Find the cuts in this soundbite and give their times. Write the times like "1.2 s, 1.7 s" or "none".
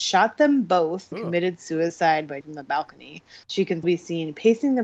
1.1 s, 2.4 s, 3.4 s, 3.8 s